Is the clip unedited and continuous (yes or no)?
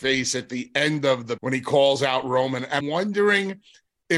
no